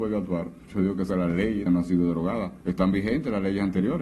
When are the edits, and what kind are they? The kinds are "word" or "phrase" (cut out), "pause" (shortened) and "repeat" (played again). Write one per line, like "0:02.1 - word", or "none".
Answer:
0:01.1 - word
0:01.7 - word
0:02.6 - pause